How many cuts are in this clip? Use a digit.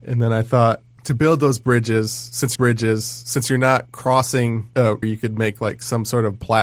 2